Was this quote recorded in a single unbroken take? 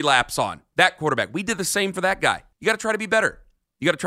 no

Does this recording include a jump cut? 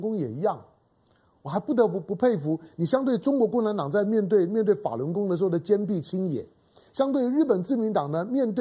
no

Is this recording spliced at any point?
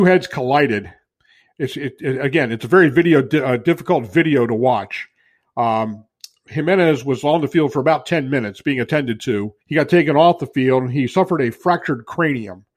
yes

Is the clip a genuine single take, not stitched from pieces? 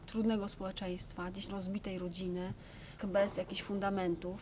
no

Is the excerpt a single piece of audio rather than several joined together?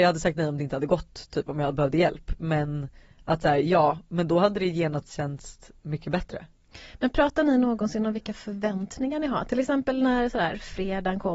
yes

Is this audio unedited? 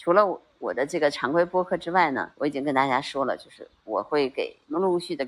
no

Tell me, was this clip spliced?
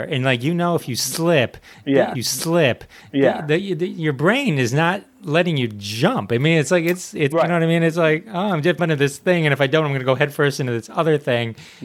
yes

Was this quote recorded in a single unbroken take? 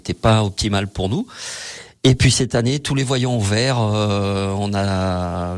yes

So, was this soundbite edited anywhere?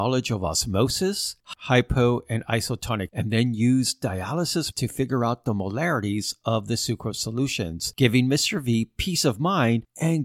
yes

